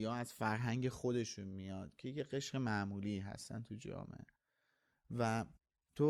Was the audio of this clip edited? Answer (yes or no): no